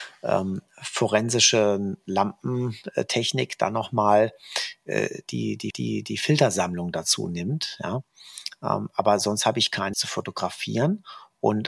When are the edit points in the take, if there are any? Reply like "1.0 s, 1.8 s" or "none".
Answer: 5.7 s, 9.9 s